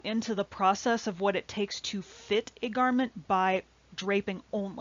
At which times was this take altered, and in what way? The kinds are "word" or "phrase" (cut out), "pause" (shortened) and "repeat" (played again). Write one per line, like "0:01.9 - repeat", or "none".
none